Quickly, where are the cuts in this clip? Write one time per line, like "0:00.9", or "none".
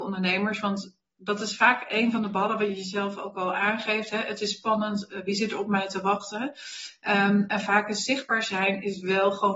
none